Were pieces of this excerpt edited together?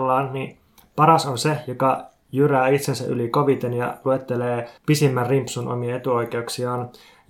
yes; 1 cut; at 4.8 s

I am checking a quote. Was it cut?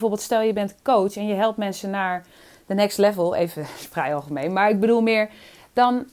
no; 0 cuts

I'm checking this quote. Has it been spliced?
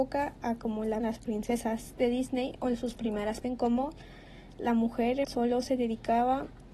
yes; 3 cuts; at 1.0 s, 3.4 s, 5.2 s

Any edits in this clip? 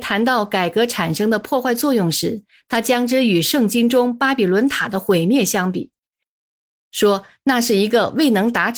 no; 0 cuts

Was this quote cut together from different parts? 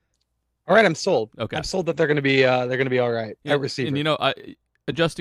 no; 0 cuts

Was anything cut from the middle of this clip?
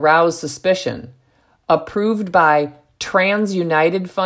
no; 0 cuts

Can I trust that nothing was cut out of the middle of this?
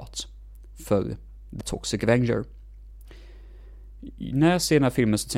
no; 1 cut; at 1.6 s

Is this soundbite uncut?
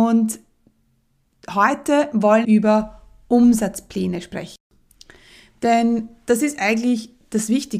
no; 1 cut; at 2.4 s

